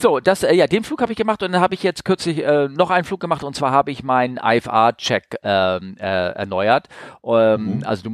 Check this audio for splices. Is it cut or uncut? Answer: uncut